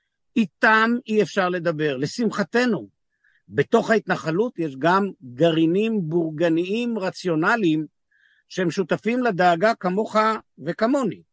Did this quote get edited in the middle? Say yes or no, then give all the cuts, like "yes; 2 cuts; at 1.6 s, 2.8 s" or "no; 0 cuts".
no; 0 cuts